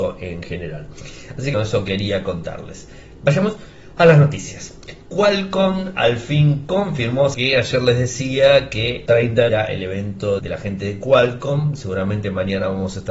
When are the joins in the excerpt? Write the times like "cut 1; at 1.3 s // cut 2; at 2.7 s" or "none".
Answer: cut 1; at 1.5 s // cut 2; at 7.3 s // cut 3; at 9.1 s // cut 4; at 9.5 s // cut 5; at 10.4 s